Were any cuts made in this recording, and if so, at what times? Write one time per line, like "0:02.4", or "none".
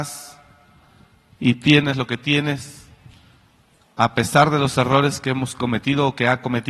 none